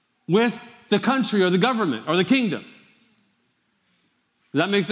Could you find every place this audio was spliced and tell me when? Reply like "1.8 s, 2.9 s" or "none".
none